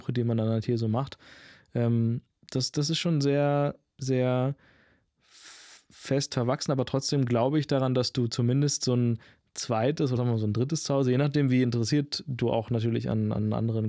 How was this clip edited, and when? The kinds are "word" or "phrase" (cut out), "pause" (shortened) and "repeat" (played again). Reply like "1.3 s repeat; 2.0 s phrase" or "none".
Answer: 10.2 s word